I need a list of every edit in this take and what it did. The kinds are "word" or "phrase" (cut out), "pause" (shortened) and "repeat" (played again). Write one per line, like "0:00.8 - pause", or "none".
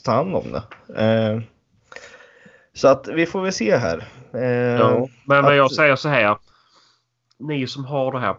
none

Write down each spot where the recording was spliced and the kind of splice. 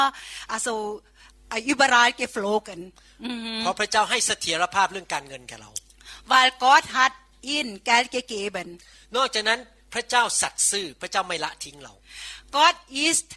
none

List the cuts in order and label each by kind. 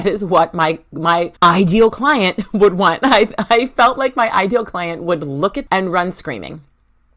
0:01.4 - pause
0:05.7 - word

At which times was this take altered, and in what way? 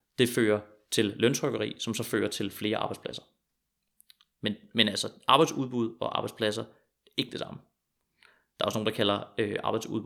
none

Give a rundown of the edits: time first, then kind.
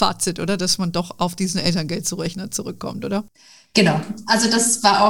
none

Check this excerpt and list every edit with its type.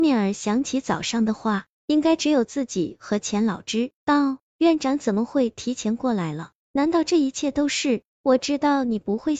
0:04.0 - pause
0:04.5 - pause

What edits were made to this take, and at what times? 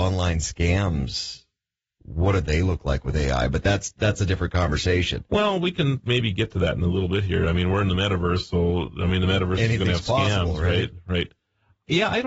none

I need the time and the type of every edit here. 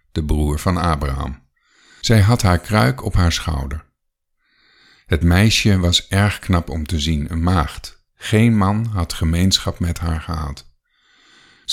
none

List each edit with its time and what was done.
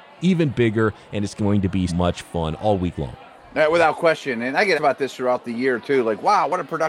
0:01.9 - word
0:04.8 - word

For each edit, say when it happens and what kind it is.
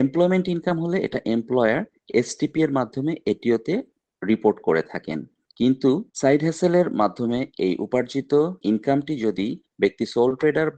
0:06.1 - pause
0:08.6 - pause

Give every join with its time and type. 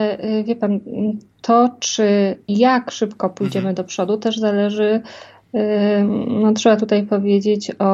0:02.4 - pause

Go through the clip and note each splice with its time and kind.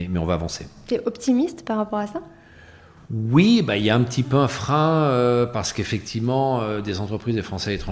none

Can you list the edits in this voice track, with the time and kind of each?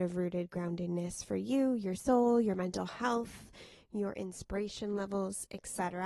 none

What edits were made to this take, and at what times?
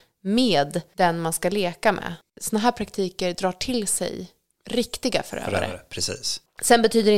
none

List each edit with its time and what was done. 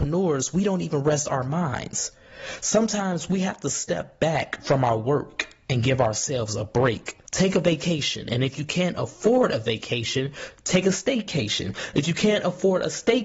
0:07.3 - pause

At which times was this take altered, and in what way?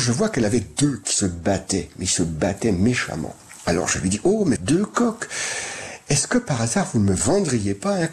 0:01.0 - word
0:04.6 - phrase

